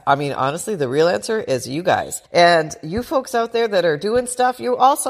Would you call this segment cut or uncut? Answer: cut